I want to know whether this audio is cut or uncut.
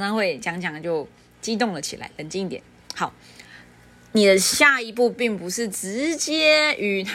uncut